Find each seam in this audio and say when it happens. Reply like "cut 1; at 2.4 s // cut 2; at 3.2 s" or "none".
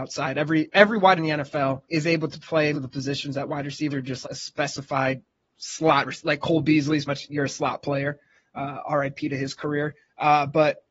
cut 1; at 1.2 s // cut 2; at 1.8 s // cut 3; at 2.7 s // cut 4; at 3.9 s // cut 5; at 4.2 s // cut 6; at 5.4 s // cut 7; at 7.1 s